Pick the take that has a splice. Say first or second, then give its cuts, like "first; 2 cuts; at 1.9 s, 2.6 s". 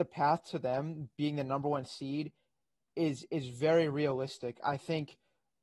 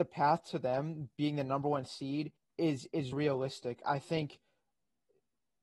second; 2 cuts; at 2.4 s, 3.1 s